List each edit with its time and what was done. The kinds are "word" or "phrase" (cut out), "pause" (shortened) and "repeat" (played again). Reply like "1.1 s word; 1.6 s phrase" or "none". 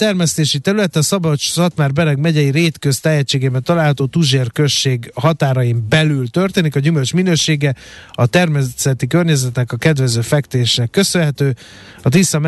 none

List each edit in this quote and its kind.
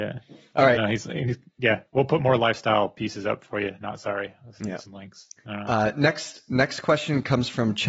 none

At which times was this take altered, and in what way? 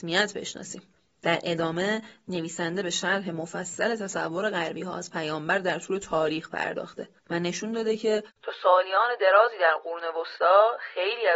0.9 s pause; 8.4 s pause

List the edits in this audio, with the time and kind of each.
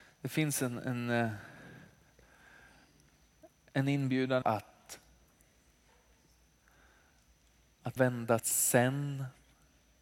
4.4 s word; 8.0 s word; 8.4 s word

